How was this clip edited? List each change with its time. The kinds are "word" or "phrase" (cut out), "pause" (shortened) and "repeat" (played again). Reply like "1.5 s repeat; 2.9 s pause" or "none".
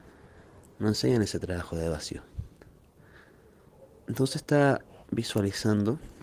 none